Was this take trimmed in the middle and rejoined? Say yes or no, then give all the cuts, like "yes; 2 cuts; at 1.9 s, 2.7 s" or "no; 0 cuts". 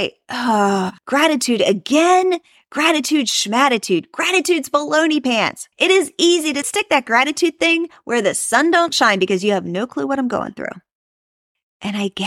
yes; 3 cuts; at 1.0 s, 5.7 s, 6.6 s